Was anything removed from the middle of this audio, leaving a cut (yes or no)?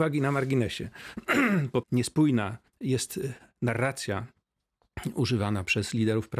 yes